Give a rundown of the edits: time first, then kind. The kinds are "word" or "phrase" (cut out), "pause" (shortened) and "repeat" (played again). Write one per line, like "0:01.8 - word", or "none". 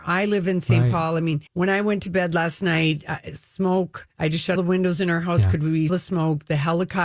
0:01.5 - pause
0:04.1 - pause
0:04.6 - word
0:05.9 - word